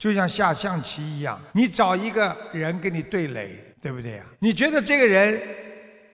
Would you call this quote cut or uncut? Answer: cut